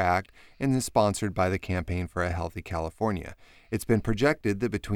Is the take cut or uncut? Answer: uncut